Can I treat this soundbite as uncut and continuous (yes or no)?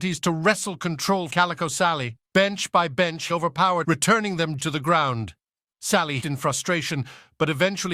no